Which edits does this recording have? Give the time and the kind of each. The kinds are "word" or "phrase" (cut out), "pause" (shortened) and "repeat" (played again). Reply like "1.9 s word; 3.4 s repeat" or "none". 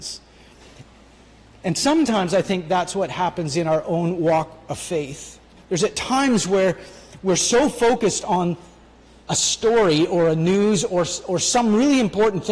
5.6 s pause

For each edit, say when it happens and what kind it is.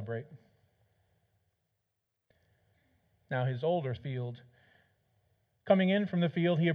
4.0 s phrase

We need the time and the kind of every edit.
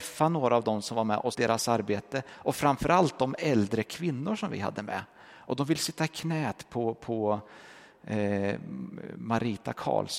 1.3 s word

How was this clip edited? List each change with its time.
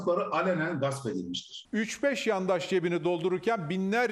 none

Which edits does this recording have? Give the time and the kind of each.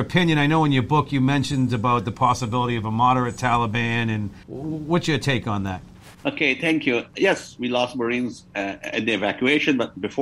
4.4 s pause; 6.1 s pause

